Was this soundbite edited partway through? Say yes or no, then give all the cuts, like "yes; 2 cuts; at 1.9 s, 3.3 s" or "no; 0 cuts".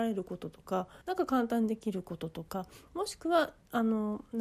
yes; 1 cut; at 1.0 s